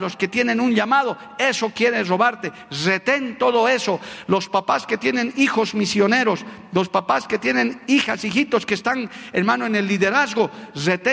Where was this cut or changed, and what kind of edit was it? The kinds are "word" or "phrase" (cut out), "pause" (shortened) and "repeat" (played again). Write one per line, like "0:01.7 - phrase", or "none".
none

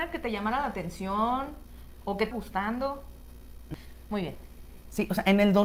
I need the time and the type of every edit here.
0:02.3 - word

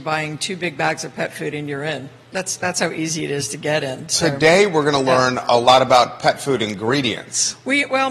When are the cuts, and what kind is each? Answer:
none

